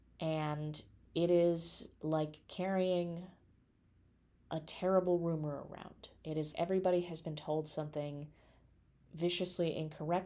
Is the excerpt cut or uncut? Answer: cut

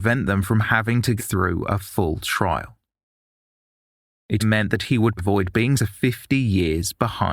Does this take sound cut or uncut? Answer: cut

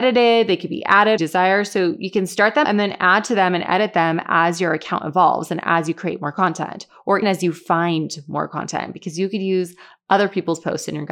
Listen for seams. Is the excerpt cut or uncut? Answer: cut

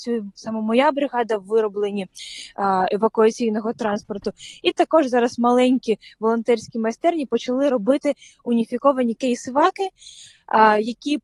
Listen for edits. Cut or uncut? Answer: uncut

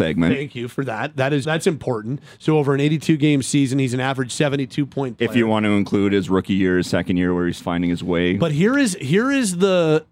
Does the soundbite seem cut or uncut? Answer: cut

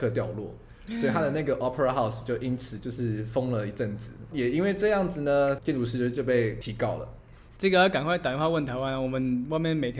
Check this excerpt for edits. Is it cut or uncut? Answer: uncut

